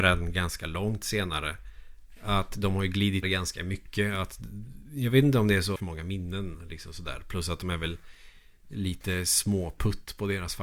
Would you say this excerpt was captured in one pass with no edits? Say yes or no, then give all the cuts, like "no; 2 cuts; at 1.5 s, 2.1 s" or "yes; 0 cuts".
no; 2 cuts; at 3.2 s, 5.8 s